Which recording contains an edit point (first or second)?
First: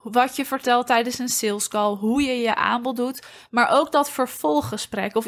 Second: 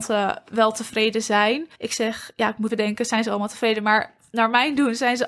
second